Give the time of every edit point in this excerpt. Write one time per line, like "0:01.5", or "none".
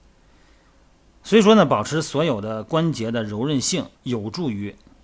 0:03.9